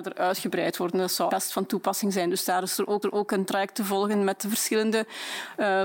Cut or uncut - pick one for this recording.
cut